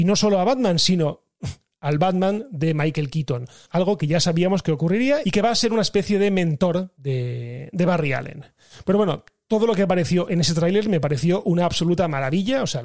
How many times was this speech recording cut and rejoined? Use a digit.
0